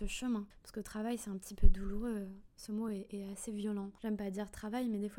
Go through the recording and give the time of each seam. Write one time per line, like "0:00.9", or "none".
none

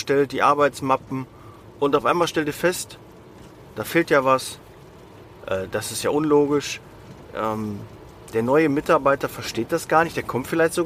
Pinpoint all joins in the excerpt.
none

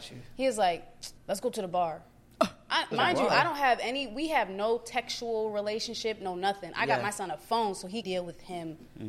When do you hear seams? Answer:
0:01.2
0:02.9
0:08.0

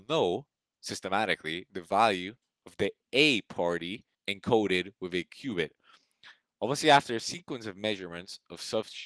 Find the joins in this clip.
0:04.1

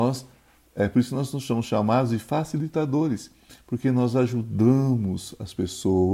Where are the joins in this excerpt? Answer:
none

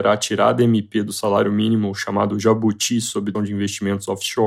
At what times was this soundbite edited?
0:03.3

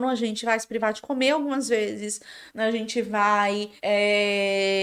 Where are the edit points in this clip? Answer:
0:02.5
0:03.8

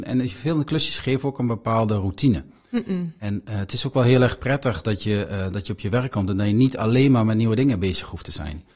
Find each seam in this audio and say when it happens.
none

